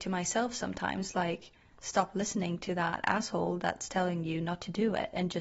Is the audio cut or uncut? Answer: uncut